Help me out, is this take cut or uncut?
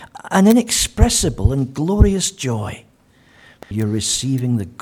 uncut